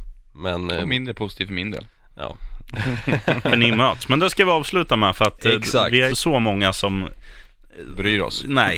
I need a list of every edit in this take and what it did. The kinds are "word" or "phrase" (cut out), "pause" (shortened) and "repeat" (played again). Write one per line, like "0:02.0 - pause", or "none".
0:06.1 - word